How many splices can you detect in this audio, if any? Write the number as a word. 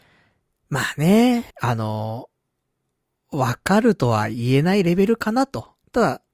one